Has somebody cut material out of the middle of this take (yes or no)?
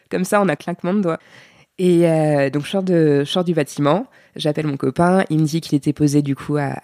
no